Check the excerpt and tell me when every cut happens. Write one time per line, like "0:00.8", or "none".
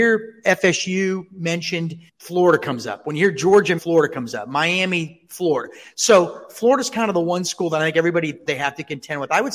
0:02.1
0:03.8
0:08.5